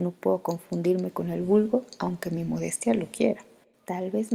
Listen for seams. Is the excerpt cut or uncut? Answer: uncut